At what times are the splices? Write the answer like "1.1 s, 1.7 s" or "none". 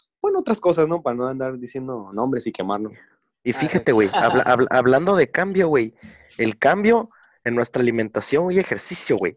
none